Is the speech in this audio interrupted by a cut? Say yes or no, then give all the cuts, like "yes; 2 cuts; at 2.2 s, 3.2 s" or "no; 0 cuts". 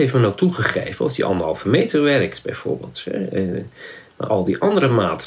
yes; 1 cut; at 4.3 s